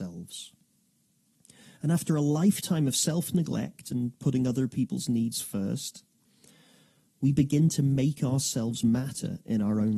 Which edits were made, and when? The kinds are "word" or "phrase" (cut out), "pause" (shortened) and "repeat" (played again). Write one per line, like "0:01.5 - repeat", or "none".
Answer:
none